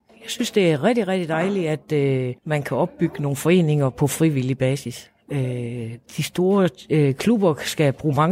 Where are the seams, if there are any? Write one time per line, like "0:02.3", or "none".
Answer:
0:02.4
0:06.0